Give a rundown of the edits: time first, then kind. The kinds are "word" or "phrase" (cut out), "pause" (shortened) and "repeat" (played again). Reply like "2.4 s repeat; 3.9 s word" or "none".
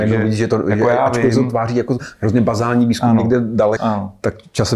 3.8 s word